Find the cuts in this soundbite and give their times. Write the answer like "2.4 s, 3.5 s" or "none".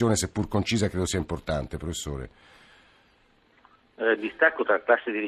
none

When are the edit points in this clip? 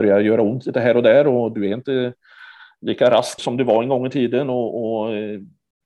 3.4 s

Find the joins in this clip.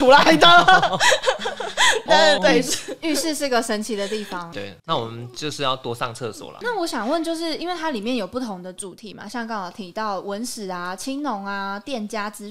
2.1 s, 2.4 s, 4.8 s

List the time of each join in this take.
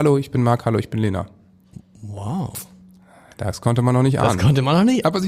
none

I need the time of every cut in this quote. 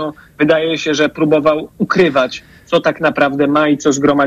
none

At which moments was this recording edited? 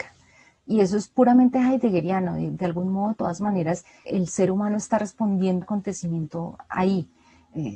4.0 s, 5.6 s

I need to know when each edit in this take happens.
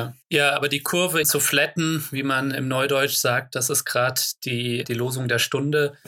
1.2 s

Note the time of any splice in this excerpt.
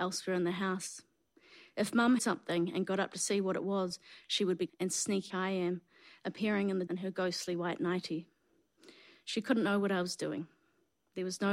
2.2 s, 4.7 s, 5.3 s, 6.9 s

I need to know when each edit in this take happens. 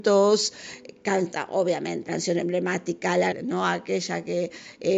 2.1 s, 3.3 s

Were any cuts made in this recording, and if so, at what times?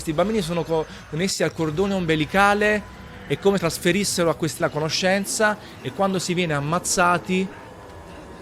3.6 s, 4.6 s

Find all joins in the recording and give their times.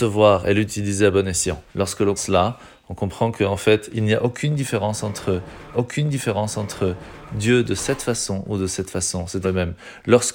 1.7 s, 2.2 s, 5.7 s, 9.4 s

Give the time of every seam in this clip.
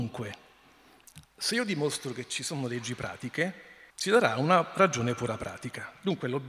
1.2 s, 3.9 s

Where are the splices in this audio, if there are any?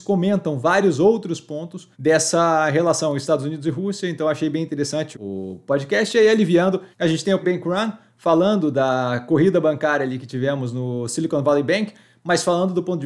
1.9 s, 5.1 s, 6.9 s, 7.4 s

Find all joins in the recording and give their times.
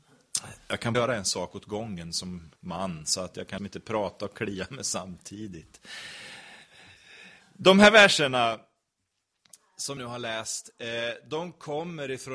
0.9 s, 2.6 s, 3.6 s, 10.0 s

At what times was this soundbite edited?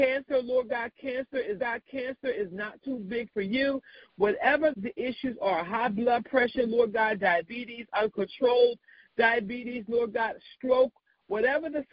1.6 s, 4.7 s

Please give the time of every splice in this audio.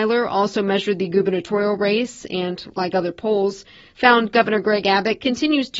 none

